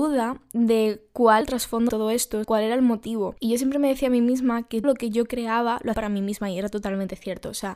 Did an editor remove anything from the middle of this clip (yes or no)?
yes